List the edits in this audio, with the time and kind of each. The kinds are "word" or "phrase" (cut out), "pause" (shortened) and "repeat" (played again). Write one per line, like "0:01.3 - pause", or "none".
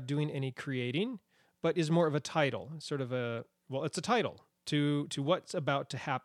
none